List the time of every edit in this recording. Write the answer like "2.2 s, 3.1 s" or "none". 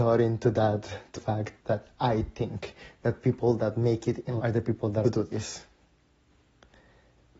1.1 s, 1.6 s, 4.4 s, 5.0 s